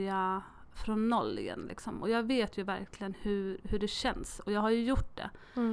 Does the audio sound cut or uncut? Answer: uncut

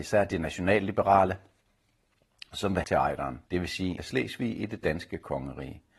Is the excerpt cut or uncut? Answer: cut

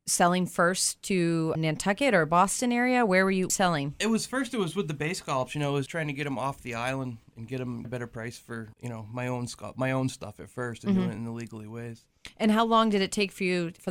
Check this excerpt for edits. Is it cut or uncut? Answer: cut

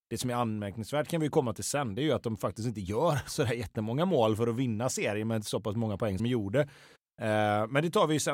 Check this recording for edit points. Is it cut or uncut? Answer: cut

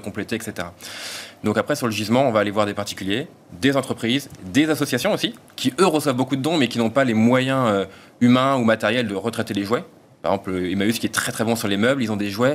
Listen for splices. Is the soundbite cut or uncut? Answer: uncut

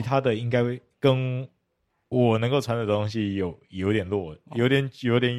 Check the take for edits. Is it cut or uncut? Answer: uncut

